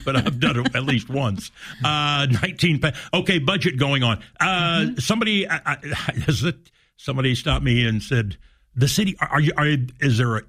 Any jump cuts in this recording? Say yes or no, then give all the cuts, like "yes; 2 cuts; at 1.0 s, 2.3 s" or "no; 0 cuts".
no; 0 cuts